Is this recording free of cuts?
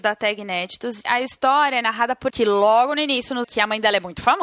no; 3 cuts; at 1.0 s, 2.3 s, 3.4 s

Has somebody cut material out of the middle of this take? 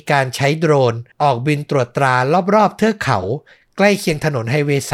yes; 1 cut; at 1.1 s

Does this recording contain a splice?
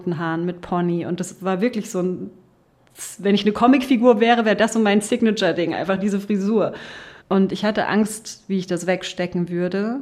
yes; 1 cut; at 7.2 s

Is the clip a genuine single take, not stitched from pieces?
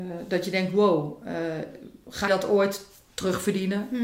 no; 1 cut; at 2.3 s

